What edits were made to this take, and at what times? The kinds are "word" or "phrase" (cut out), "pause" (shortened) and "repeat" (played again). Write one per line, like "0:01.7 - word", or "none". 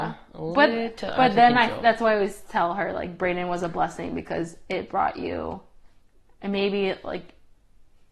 none